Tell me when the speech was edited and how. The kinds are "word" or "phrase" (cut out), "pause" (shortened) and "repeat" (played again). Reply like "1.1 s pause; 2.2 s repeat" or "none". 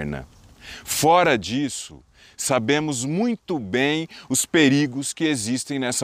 none